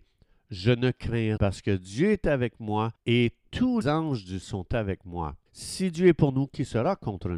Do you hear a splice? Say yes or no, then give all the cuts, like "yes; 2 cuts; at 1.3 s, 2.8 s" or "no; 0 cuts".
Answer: yes; 5 cuts; at 1.4 s, 2.9 s, 3.8 s, 4.4 s, 5.5 s